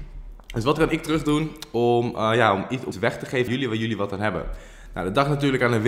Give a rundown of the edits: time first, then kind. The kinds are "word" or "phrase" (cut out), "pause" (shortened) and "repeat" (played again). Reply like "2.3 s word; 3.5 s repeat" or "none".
2.9 s word; 3.5 s word